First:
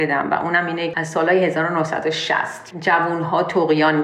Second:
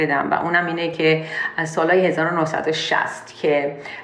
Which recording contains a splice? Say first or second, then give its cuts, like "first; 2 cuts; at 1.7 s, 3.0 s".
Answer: first; 2 cuts; at 0.9 s, 2.7 s